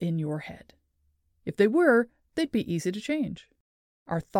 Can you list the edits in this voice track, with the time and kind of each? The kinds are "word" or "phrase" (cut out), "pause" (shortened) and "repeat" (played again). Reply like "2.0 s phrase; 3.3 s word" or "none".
none

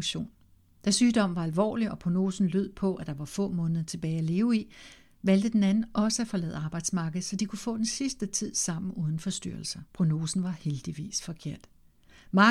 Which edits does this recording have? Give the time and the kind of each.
9.9 s pause

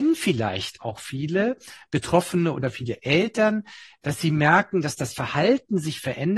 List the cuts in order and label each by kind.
none

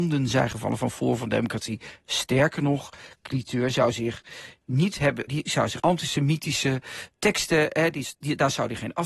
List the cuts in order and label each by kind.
5.3 s word; 5.8 s phrase

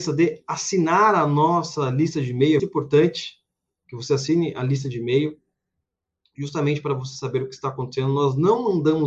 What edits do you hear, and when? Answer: 2.6 s word

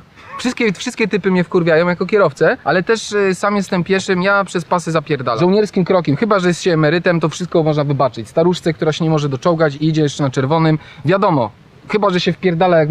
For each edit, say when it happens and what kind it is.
2.6 s pause

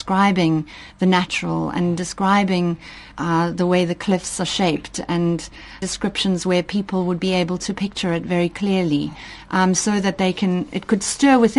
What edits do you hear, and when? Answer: 3.1 s pause; 5.8 s word

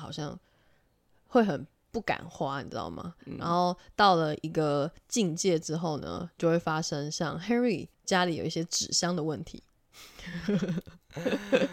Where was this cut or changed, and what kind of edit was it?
7.9 s pause

